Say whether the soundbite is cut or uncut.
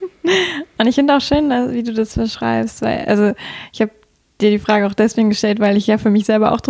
uncut